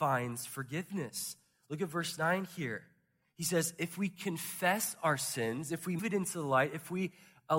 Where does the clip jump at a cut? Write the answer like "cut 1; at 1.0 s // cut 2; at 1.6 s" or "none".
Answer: cut 1; at 6.0 s